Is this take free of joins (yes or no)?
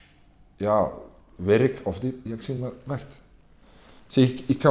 yes